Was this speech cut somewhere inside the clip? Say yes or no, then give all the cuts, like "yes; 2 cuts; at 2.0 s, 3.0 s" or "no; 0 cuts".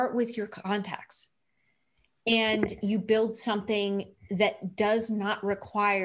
no; 0 cuts